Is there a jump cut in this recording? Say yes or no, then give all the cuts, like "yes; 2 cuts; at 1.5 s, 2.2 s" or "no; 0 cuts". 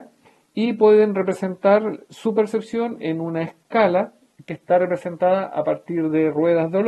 no; 0 cuts